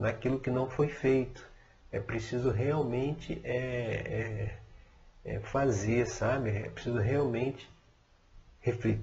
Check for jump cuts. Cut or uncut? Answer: uncut